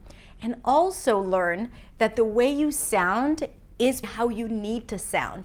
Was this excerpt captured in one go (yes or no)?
no